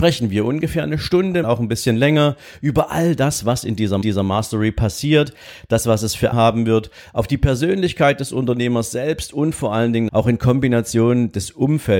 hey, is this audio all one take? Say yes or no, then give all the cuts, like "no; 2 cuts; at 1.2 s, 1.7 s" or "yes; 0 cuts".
no; 4 cuts; at 1.4 s, 4.0 s, 6.3 s, 10.1 s